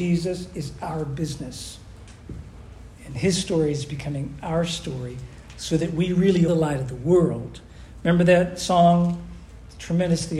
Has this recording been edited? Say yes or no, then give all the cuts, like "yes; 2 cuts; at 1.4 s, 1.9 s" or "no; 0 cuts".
yes; 1 cut; at 6.5 s